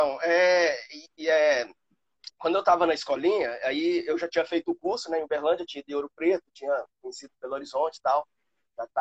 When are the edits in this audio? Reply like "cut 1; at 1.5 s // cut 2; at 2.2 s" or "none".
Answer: none